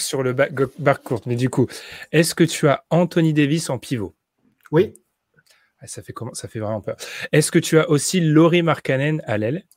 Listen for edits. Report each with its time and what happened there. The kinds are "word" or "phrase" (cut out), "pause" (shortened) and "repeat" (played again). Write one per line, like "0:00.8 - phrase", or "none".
none